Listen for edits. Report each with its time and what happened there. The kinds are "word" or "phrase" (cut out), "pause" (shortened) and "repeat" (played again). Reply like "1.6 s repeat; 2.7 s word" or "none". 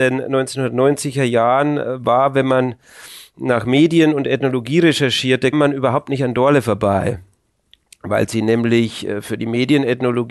5.5 s word